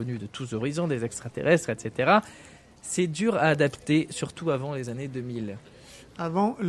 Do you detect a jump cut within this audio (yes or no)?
no